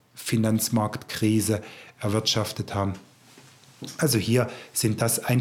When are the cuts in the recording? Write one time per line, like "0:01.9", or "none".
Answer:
none